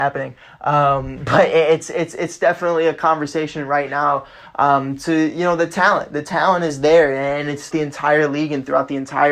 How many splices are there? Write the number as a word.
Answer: one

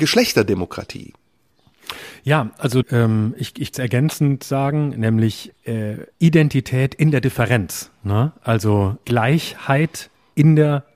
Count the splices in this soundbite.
five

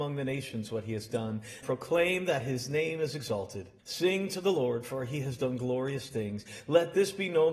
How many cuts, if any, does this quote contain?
two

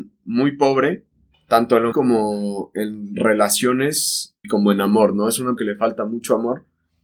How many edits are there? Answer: four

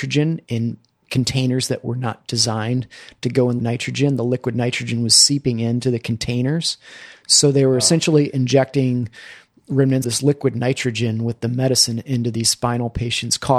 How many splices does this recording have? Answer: two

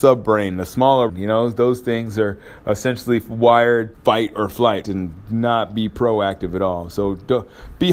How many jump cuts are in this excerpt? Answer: three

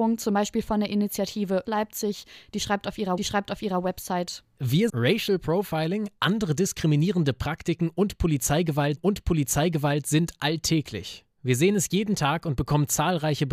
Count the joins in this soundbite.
four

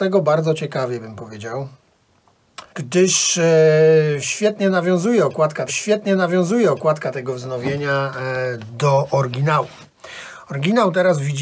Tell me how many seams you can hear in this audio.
two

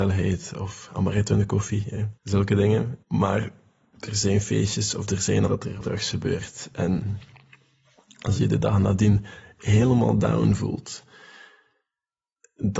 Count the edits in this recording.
four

